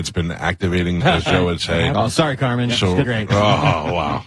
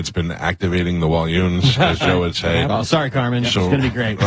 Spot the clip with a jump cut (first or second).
first